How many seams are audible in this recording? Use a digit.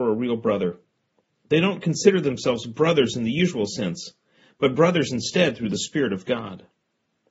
0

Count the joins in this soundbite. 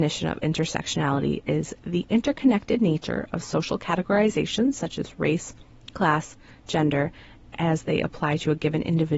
0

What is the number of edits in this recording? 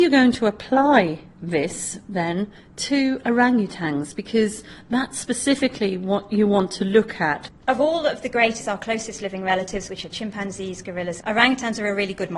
3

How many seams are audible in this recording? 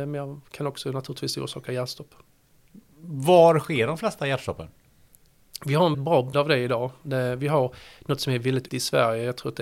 3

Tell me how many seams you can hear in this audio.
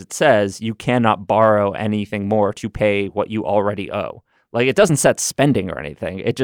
0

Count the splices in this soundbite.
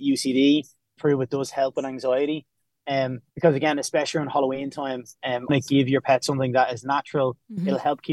3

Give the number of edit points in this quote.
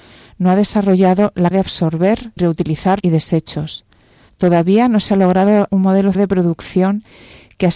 5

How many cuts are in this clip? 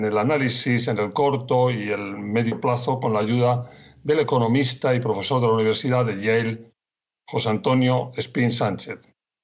0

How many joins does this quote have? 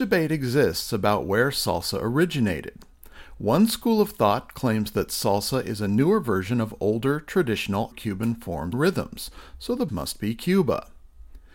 3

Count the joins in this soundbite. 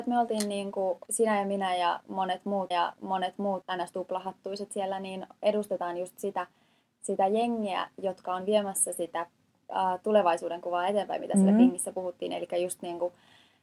1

